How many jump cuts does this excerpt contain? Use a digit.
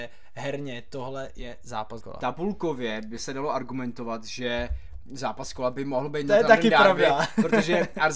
1